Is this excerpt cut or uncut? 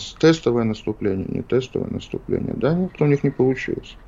cut